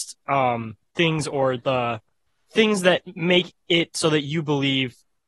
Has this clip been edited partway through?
yes; 1 cut; at 2.3 s

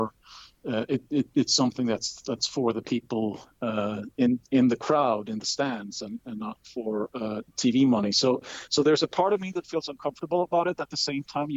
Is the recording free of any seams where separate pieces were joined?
no; 1 cut; at 7.5 s

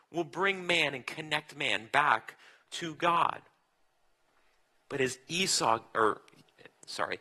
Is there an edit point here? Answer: no; 0 cuts

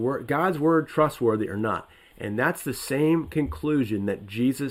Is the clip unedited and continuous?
yes; 0 cuts

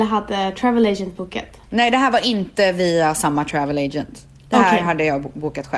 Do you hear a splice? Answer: yes; 1 cut; at 1.6 s

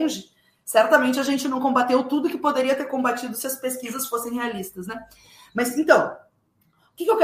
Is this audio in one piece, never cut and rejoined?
yes; 0 cuts

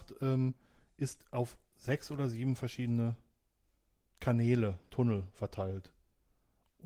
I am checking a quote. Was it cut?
no; 0 cuts

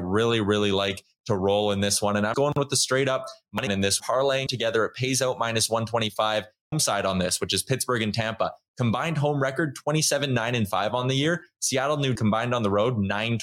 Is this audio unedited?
no; 6 cuts; at 2.3 s, 3.7 s, 4.0 s, 4.5 s, 6.7 s, 12.2 s

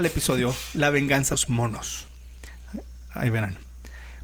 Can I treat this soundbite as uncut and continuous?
no; 1 cut; at 1.3 s

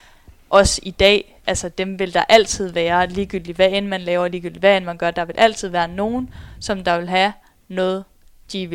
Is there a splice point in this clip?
no; 0 cuts

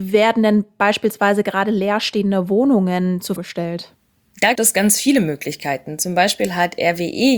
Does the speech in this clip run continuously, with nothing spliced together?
no; 2 cuts; at 3.4 s, 4.6 s

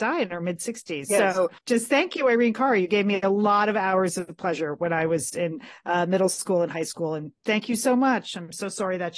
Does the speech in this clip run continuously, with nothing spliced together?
no; 1 cut; at 1.6 s

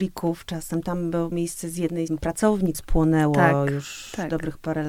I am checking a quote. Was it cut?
yes; 3 cuts; at 1.3 s, 2.1 s, 2.7 s

